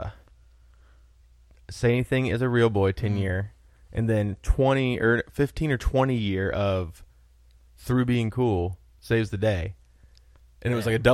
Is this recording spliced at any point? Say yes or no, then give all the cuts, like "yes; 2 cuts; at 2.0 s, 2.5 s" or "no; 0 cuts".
no; 0 cuts